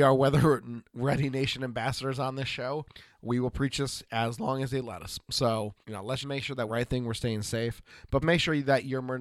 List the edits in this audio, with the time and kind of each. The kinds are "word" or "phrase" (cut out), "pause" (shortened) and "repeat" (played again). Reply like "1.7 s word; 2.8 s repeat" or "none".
5.8 s pause; 6.2 s word; 6.7 s phrase; 8.2 s word